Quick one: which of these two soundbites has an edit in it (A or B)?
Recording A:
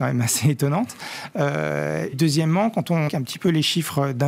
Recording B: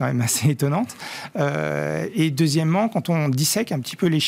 A